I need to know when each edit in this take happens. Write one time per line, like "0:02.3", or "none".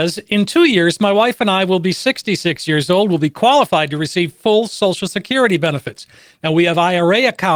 none

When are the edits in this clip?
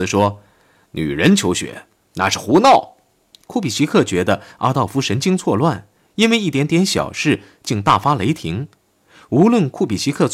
none

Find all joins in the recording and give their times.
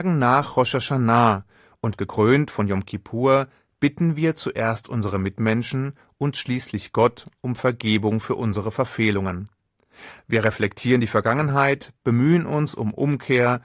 none

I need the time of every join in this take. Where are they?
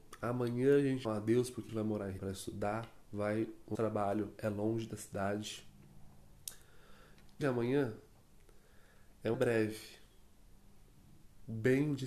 0:01.0
0:01.7
0:02.2
0:03.7
0:07.4
0:09.3

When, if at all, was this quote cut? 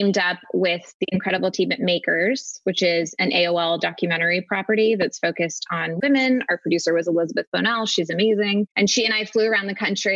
0:08.7

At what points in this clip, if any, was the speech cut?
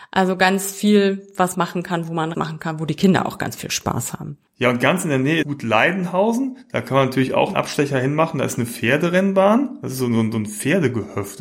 0:01.5
0:02.3
0:04.5
0:05.4
0:07.5

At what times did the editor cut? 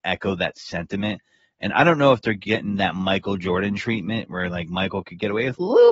none

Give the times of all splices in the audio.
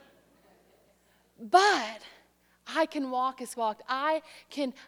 0:03.5

